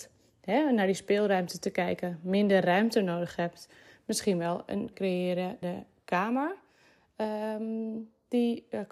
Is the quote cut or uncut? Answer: cut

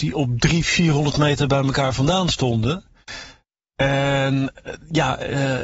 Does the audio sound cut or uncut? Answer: uncut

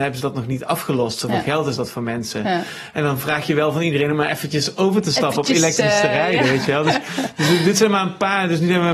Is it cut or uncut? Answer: uncut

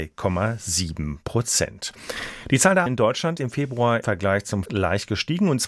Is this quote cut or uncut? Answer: cut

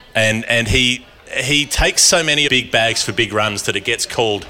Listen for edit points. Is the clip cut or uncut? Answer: cut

